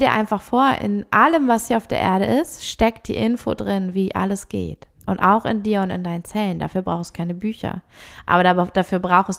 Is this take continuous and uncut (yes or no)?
no